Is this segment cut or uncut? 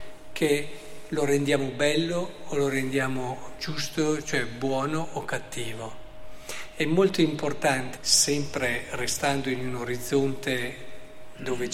cut